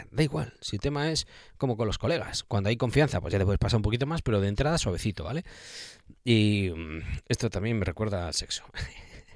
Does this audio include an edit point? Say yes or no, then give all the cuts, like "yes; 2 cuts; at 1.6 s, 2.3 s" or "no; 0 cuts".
no; 0 cuts